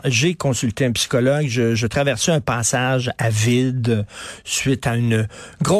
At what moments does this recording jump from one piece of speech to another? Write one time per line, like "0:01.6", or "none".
none